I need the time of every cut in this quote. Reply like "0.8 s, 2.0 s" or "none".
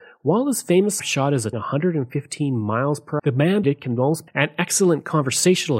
1.0 s, 1.5 s, 3.2 s, 3.6 s, 4.3 s